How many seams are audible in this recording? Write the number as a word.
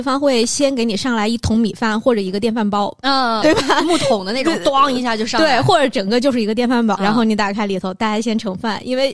two